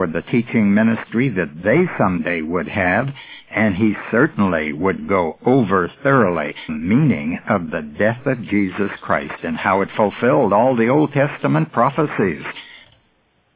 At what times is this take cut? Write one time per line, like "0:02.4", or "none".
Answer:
0:06.7